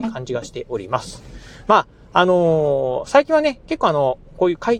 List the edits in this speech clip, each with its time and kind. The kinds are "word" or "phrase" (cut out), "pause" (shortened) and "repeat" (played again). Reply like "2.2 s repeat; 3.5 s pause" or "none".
none